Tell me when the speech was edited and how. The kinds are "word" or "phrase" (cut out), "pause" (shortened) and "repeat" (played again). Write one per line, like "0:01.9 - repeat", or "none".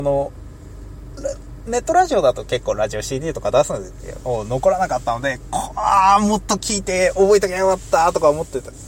none